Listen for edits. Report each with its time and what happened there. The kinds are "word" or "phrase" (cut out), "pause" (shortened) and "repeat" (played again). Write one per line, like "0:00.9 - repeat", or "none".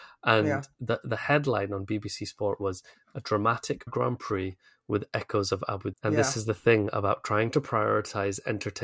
0:03.9 - word
0:05.9 - word

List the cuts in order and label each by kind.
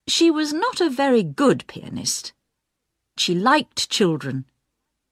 0:03.2 - word

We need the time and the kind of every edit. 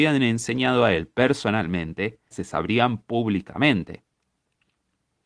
0:02.3 - word

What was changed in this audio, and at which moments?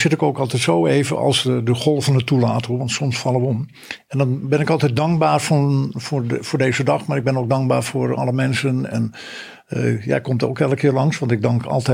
none

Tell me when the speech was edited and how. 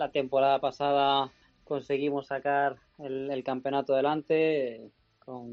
0:01.4 - pause

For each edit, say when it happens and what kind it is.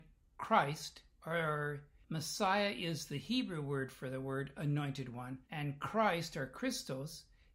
0:02.0 - pause
0:05.4 - pause

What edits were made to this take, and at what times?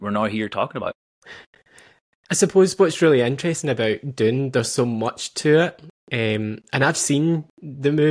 0:01.0 - pause

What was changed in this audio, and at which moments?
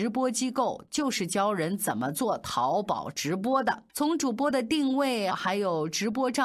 0:03.9 - pause
0:05.3 - phrase

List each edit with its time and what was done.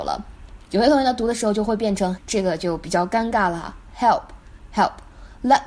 0:02.2 - word

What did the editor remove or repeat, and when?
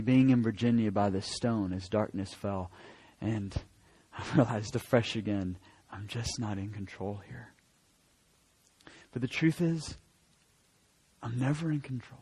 none

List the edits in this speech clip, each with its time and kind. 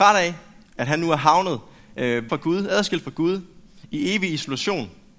0:02.3 - word

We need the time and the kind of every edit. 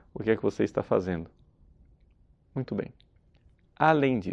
none

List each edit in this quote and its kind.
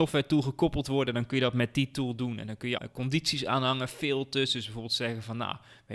0:02.8 - word

